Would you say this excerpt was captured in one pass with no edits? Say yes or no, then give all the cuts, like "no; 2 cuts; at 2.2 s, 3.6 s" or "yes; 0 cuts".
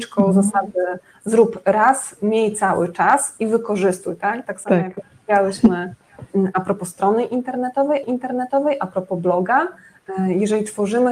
no; 1 cut; at 8.0 s